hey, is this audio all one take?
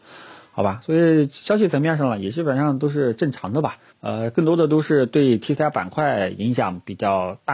no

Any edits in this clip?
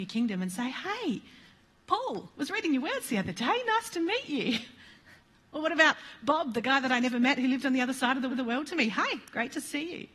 yes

